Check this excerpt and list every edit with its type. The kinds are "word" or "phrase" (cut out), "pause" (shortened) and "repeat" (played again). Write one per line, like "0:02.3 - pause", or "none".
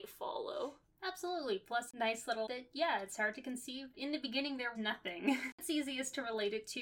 0:02.5 - word
0:03.9 - word
0:04.7 - word
0:05.6 - pause